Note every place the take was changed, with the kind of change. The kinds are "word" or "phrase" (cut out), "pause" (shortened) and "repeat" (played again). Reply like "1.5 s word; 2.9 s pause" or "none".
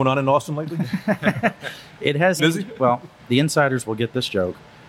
2.4 s word; 3.2 s word